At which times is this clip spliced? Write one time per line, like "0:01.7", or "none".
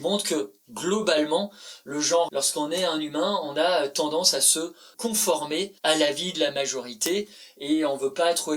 0:02.3
0:04.9
0:05.8